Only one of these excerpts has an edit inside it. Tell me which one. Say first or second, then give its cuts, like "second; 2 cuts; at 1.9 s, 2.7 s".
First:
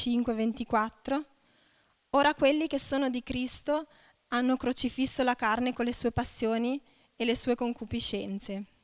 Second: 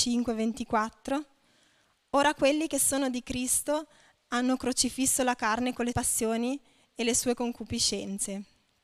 second; 1 cut; at 5.9 s